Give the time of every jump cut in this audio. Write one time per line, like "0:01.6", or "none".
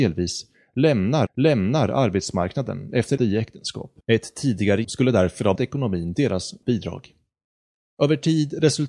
0:01.3
0:03.2
0:04.0
0:04.8
0:05.6
0:06.6